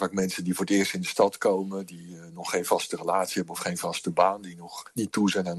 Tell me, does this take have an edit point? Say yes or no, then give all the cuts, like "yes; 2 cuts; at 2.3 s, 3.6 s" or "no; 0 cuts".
no; 0 cuts